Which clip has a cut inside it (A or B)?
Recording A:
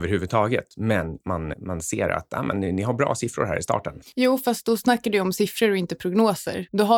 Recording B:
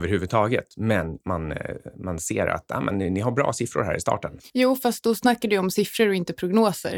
A